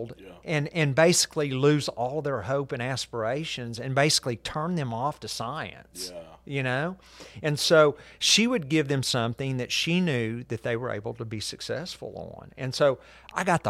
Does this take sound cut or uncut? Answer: uncut